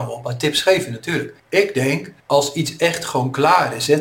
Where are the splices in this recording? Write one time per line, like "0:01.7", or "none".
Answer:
0:01.4
0:02.2